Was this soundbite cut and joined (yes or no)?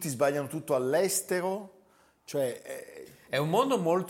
no